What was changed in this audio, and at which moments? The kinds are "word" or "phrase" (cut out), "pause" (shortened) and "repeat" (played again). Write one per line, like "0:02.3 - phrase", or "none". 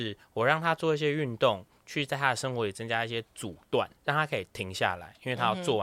0:04.0 - pause